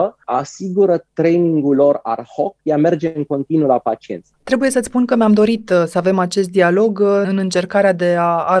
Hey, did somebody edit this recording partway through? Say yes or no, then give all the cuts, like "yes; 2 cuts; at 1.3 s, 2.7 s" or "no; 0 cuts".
no; 0 cuts